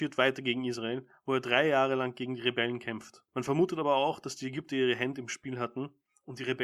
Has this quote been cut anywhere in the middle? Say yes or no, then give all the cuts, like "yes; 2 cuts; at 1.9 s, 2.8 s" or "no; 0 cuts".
yes; 1 cut; at 3.3 s